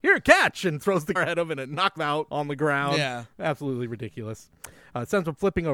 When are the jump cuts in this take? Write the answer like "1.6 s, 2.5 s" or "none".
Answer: 1.2 s, 2.0 s, 2.3 s